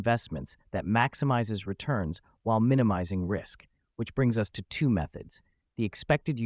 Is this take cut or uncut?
uncut